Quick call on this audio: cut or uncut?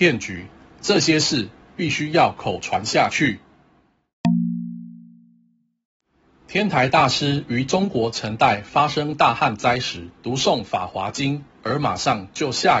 cut